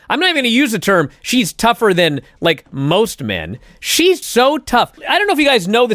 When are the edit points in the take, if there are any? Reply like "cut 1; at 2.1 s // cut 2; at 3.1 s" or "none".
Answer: cut 1; at 4.2 s // cut 2; at 5.0 s